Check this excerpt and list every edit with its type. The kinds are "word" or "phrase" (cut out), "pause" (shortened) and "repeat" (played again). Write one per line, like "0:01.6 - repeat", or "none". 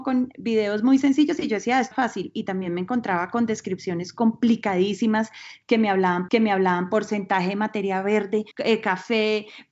0:01.9 - word
0:06.3 - repeat
0:08.5 - pause